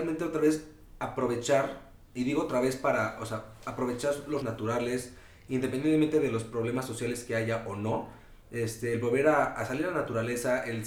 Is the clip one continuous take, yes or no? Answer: no